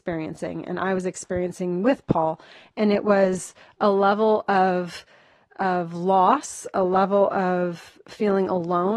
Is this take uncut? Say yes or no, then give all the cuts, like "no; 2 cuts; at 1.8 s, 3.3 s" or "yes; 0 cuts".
yes; 0 cuts